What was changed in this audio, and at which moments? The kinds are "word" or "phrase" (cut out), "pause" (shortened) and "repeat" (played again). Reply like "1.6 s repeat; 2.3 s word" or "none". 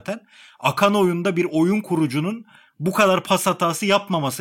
none